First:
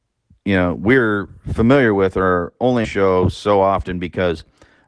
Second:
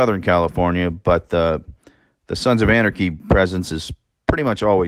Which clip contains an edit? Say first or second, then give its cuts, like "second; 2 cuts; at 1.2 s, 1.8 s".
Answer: first; 1 cut; at 2.8 s